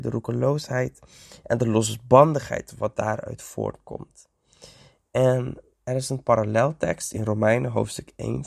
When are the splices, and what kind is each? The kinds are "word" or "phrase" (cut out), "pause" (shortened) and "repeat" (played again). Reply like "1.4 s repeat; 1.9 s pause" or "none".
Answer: 5.7 s pause